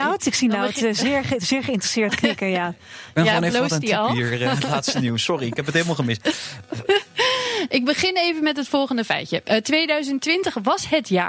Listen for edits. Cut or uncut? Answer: uncut